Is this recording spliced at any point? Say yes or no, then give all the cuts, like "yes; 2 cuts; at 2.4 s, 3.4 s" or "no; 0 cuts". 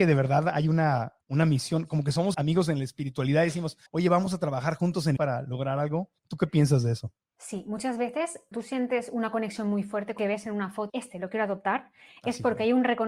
yes; 9 cuts; at 1.2 s, 2.3 s, 3.9 s, 5.2 s, 6.2 s, 7.3 s, 8.5 s, 10.2 s, 10.9 s